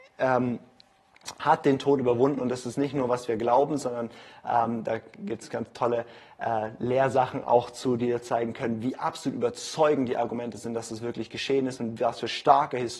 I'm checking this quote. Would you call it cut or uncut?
uncut